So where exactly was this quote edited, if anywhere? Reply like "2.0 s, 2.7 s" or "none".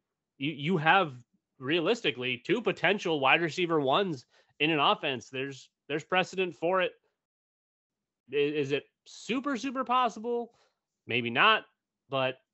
none